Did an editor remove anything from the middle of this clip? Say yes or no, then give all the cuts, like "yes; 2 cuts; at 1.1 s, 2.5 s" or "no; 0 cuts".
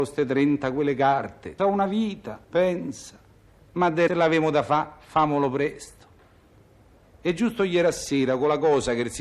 yes; 3 cuts; at 1.6 s, 2.4 s, 4.1 s